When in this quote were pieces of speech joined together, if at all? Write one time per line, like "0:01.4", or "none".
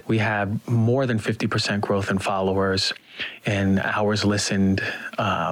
none